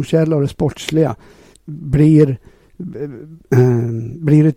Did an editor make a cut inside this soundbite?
yes; 1 cut; at 1.5 s

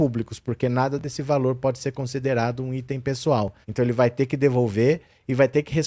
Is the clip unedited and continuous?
no; 1 cut; at 3.6 s

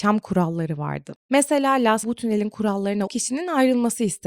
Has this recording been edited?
yes; 2 cuts; at 2.0 s, 3.1 s

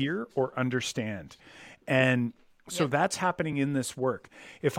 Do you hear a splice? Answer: no; 0 cuts

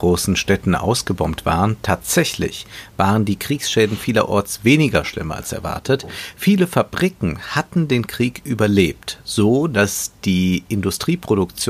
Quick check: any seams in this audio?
no; 0 cuts

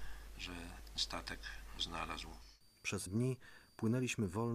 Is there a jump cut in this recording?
yes; 3 cuts; at 1.0 s, 1.8 s, 3.1 s

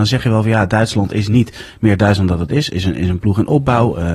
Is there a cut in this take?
no; 0 cuts

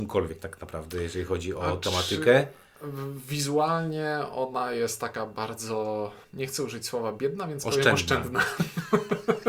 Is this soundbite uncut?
no; 1 cut; at 6.2 s

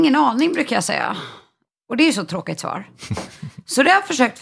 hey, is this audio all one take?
yes; 0 cuts

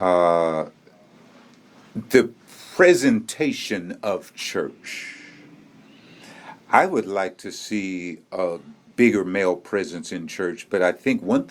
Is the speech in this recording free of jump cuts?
yes; 0 cuts

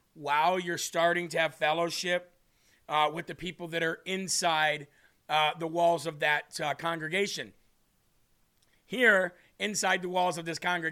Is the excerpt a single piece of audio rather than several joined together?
yes; 0 cuts

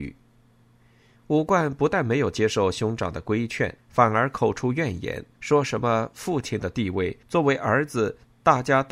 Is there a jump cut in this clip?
yes; 3 cuts; at 3.8 s, 5.3 s, 7.2 s

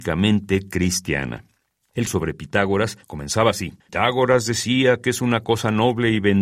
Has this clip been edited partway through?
yes; 2 cuts; at 2.1 s, 3.8 s

